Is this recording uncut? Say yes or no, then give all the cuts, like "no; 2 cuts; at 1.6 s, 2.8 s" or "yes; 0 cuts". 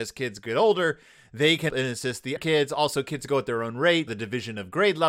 no; 3 cuts; at 1.7 s, 2.4 s, 4.1 s